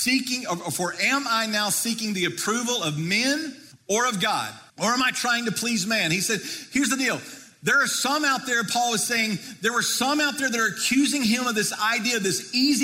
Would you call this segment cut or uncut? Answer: cut